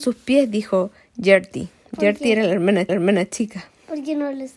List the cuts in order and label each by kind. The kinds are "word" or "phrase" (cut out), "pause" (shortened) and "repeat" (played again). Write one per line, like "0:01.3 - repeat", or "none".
0:02.9 - repeat